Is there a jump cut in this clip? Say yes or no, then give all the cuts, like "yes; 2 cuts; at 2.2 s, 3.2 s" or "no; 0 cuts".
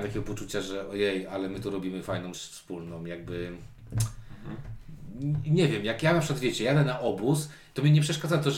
yes; 1 cut; at 2.3 s